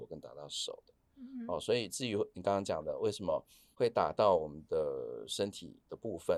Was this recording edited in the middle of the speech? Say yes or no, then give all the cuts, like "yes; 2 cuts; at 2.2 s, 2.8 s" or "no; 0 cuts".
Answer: no; 0 cuts